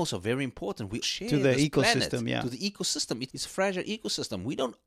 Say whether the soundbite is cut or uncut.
cut